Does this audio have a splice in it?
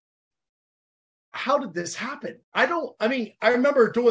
yes; 1 cut; at 2.4 s

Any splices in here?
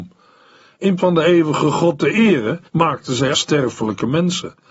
yes; 3 cuts; at 1.0 s, 2.7 s, 3.3 s

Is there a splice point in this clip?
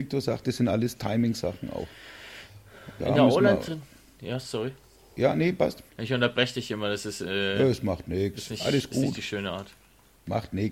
yes; 2 cuts; at 3.0 s, 5.9 s

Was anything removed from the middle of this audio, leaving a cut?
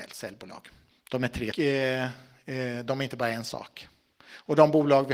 yes; 2 cuts; at 0.9 s, 1.5 s

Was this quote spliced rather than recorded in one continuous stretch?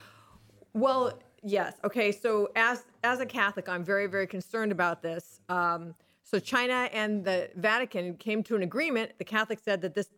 no; 0 cuts

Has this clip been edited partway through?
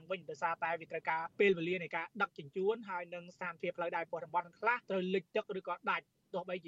yes; 2 cuts; at 1.3 s, 4.8 s

